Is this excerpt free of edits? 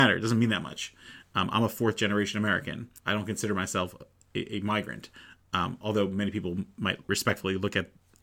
no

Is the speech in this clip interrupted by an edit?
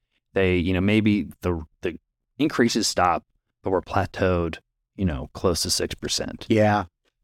no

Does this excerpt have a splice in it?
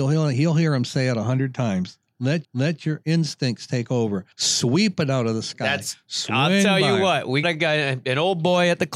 yes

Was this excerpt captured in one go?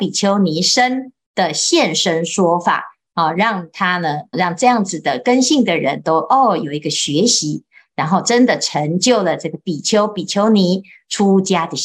no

